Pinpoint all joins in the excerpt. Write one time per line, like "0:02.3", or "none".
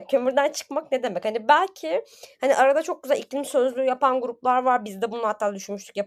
none